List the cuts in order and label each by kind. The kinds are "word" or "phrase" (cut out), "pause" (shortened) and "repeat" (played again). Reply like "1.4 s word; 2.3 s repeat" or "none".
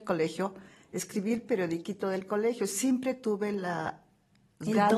none